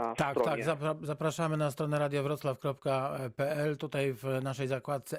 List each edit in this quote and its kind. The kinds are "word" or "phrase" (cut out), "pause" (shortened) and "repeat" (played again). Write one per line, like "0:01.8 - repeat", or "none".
none